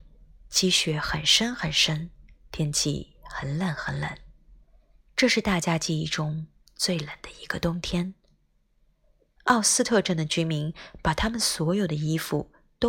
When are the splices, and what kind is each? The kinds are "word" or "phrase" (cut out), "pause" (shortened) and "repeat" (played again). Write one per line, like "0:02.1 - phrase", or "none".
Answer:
none

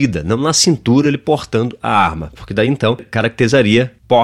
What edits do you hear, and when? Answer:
none

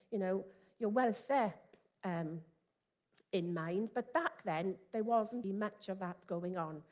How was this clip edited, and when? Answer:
0:05.4 - word

